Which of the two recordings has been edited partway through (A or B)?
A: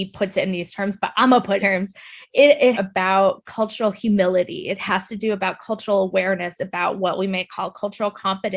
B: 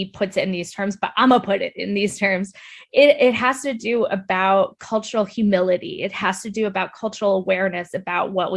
A